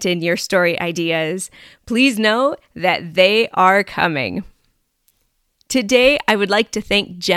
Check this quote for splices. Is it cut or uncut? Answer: uncut